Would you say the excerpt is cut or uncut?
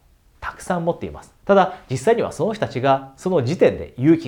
cut